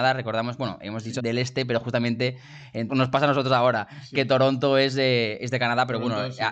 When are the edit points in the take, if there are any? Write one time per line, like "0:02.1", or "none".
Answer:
0:01.2
0:02.9